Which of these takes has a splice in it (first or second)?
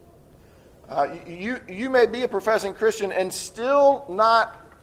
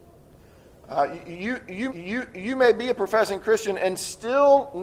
second